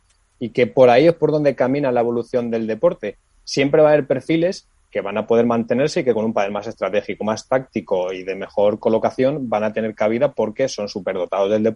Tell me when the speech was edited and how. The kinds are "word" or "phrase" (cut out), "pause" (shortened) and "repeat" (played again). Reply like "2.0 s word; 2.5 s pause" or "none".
none